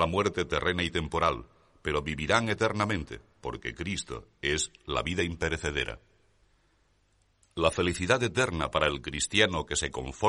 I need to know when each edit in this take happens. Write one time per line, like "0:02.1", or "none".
none